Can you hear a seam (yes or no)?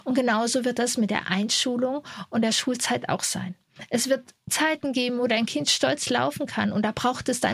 no